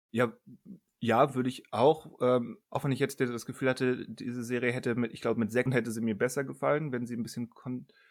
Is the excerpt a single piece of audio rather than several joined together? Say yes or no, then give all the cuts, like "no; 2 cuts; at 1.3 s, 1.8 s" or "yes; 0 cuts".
no; 2 cuts; at 2.6 s, 5.7 s